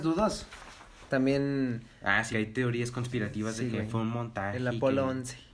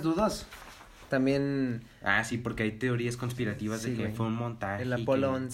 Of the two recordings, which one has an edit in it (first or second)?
first